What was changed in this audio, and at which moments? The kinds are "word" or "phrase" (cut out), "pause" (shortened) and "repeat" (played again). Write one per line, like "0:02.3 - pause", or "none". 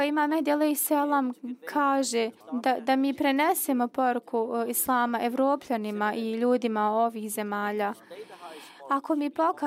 0:02.4 - pause